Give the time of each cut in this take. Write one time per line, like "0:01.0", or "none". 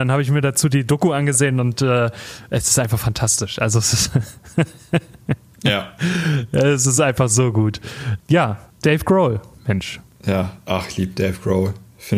none